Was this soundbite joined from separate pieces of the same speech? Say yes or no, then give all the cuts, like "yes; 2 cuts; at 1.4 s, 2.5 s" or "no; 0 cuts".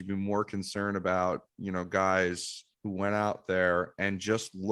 yes; 2 cuts; at 1.5 s, 2.7 s